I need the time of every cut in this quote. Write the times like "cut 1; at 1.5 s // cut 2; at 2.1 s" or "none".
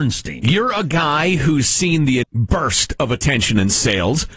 cut 1; at 2.2 s